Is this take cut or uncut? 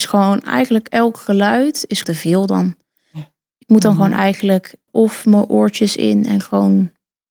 cut